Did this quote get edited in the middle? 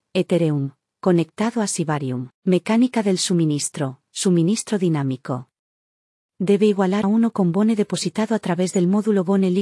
yes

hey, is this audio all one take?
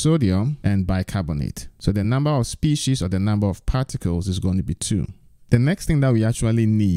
yes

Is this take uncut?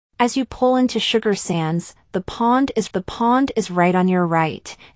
no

